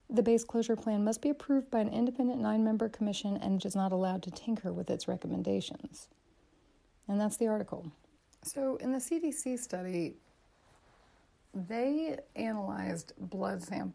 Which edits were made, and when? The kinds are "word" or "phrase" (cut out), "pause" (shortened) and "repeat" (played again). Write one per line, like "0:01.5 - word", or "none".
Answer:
0:03.6 - phrase